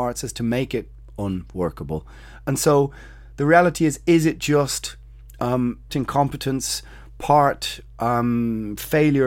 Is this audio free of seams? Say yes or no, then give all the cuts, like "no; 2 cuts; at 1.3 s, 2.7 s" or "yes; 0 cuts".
no; 1 cut; at 5.9 s